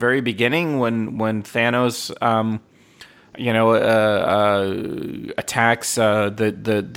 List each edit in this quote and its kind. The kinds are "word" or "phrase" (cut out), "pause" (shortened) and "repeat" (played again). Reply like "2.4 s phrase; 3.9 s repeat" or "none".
none